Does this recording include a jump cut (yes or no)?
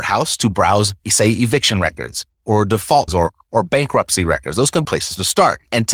yes